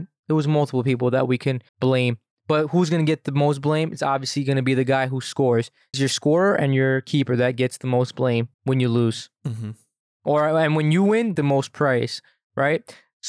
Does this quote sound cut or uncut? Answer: cut